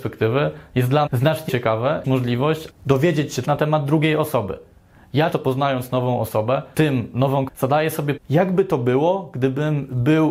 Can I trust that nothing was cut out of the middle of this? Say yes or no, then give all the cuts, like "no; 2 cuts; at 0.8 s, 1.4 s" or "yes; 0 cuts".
no; 9 cuts; at 1.1 s, 1.5 s, 2.0 s, 2.7 s, 3.4 s, 5.3 s, 6.7 s, 7.5 s, 8.2 s